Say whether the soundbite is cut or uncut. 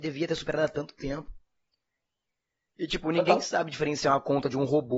uncut